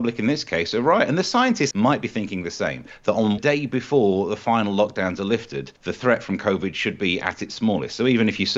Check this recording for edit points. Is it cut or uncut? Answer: cut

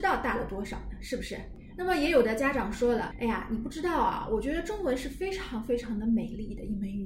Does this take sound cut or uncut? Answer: cut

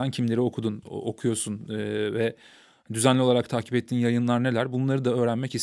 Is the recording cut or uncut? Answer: uncut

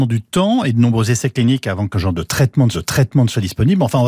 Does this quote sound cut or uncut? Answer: cut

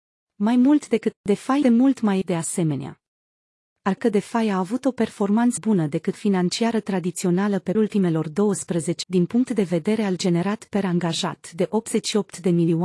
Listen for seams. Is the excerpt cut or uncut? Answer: cut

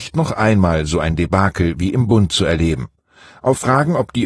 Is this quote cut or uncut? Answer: uncut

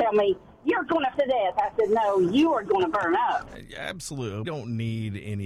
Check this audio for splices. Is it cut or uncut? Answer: cut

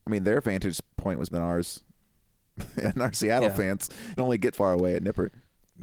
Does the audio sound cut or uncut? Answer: cut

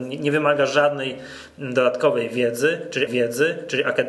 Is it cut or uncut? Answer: cut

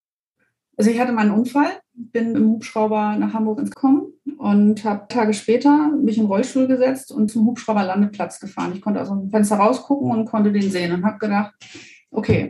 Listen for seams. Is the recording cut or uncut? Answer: cut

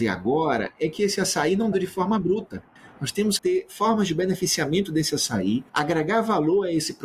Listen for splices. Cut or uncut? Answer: cut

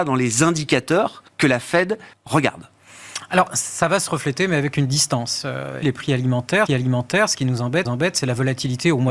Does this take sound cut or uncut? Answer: cut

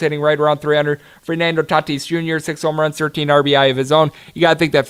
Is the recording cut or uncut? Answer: uncut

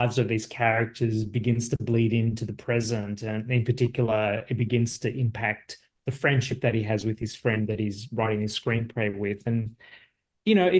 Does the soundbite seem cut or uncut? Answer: uncut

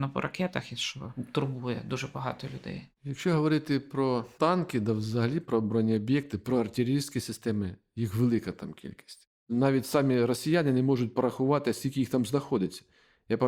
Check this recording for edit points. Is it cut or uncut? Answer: uncut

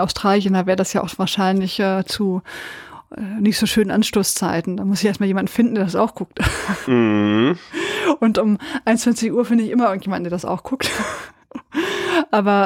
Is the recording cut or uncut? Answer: uncut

